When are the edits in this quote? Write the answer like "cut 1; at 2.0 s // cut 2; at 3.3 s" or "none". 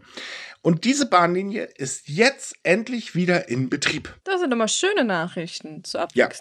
cut 1; at 4.2 s